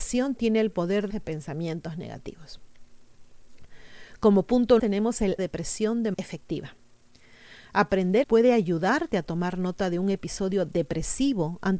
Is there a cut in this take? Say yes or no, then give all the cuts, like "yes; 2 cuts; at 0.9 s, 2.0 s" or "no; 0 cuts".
yes; 5 cuts; at 1.1 s, 4.8 s, 5.4 s, 6.1 s, 8.2 s